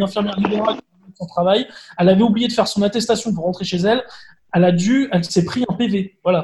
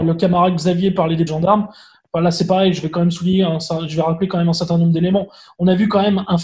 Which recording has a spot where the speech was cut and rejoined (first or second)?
second